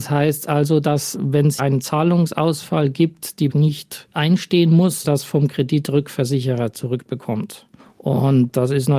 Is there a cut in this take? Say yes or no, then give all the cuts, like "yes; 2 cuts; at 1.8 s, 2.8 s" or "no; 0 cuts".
yes; 4 cuts; at 1.6 s, 3.5 s, 5.0 s, 7.8 s